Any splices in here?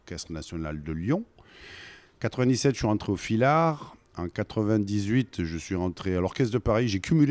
no; 0 cuts

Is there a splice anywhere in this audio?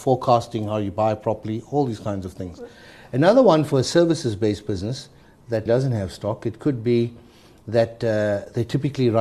yes; 1 cut; at 5.7 s

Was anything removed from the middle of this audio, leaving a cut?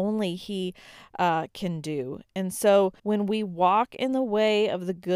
yes; 1 cut; at 3.0 s

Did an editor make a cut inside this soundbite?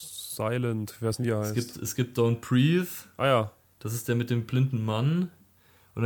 no; 0 cuts

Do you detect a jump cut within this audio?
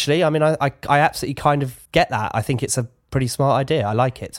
yes; 1 cut; at 1.9 s

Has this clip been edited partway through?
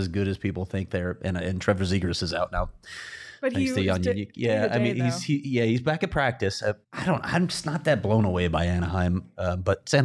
yes; 1 cut; at 6.8 s

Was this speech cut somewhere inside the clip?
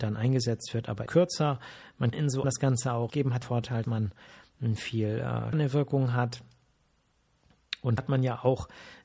yes; 8 cuts; at 1.1 s, 2.1 s, 2.4 s, 3.1 s, 3.4 s, 3.8 s, 5.5 s, 8.0 s

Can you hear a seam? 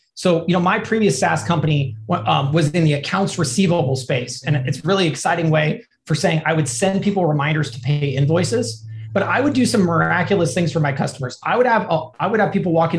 no; 0 cuts

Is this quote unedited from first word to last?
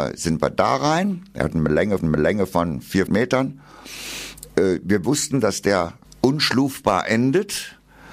no; 3 cuts; at 2.0 s, 3.1 s, 6.0 s

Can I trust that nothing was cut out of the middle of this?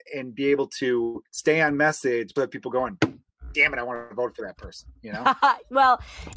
no; 2 cuts; at 1.3 s, 2.4 s

